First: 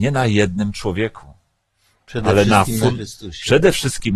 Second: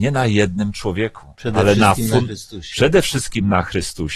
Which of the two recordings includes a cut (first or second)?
second